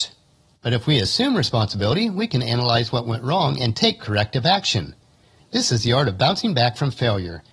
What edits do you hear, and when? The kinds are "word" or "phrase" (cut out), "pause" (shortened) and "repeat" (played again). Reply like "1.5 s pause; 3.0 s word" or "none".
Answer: none